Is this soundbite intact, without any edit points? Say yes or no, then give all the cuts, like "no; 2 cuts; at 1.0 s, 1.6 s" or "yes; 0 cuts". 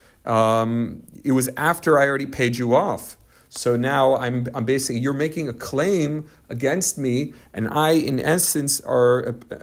yes; 0 cuts